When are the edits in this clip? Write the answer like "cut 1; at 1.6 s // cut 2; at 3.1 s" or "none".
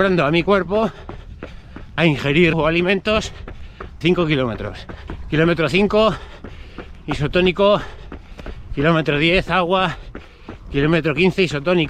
cut 1; at 2.0 s // cut 2; at 2.5 s // cut 3; at 4.0 s

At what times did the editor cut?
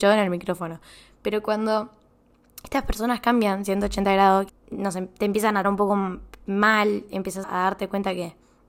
cut 1; at 4.5 s // cut 2; at 5.6 s // cut 3; at 7.4 s

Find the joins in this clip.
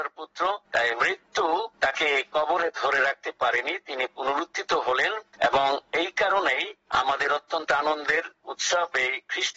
none

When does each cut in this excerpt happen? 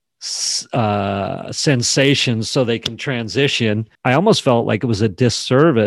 cut 1; at 3.9 s

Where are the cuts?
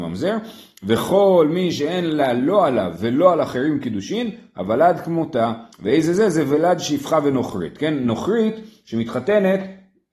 cut 1; at 5.7 s

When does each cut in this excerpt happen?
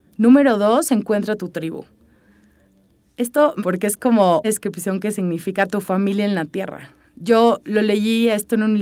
cut 1; at 3.6 s // cut 2; at 4.4 s

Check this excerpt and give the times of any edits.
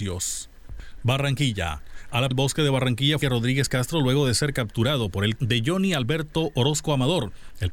cut 1; at 2.3 s // cut 2; at 3.2 s // cut 3; at 5.4 s

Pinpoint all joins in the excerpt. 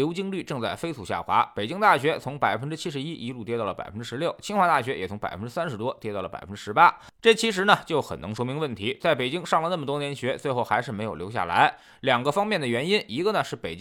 none

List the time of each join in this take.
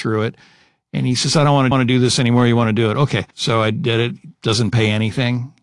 cut 1; at 1.7 s // cut 2; at 3.3 s

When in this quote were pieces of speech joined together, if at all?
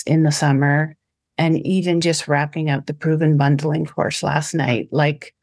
none

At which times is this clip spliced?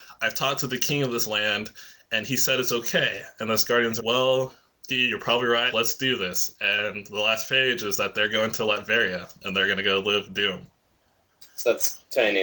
cut 1; at 4.0 s // cut 2; at 4.9 s // cut 3; at 5.7 s // cut 4; at 10.3 s

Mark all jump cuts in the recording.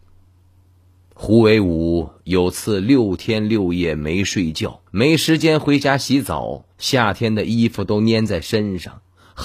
cut 1; at 4.9 s // cut 2; at 6.7 s

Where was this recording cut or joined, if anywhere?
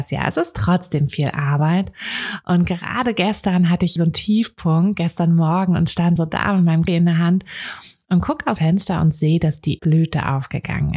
cut 1; at 4.0 s // cut 2; at 6.2 s // cut 3; at 6.9 s // cut 4; at 8.6 s // cut 5; at 9.8 s

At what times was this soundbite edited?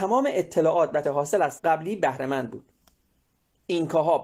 cut 1; at 1.0 s // cut 2; at 1.6 s

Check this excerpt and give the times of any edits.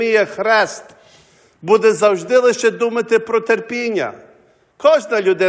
none

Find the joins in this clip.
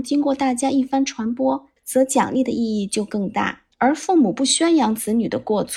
cut 1; at 1.8 s // cut 2; at 3.7 s

